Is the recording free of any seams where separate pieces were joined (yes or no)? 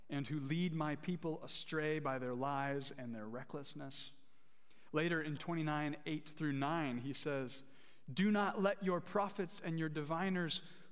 no